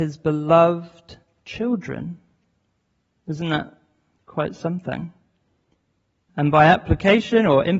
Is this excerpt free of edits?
yes; 0 cuts

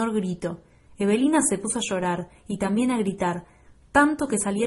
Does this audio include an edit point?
no; 0 cuts

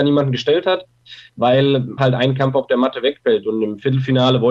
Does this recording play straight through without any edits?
no; 1 cut; at 2.0 s

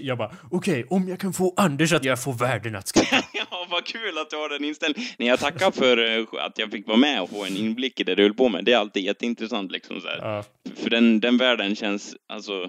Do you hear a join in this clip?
yes; 2 cuts; at 2.0 s, 7.2 s

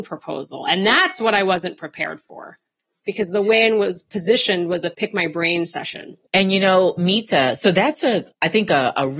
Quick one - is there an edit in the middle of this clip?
yes; 1 cut; at 6.3 s

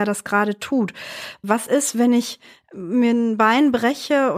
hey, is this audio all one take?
yes; 0 cuts

